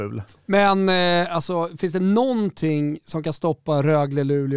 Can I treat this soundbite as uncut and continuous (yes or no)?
yes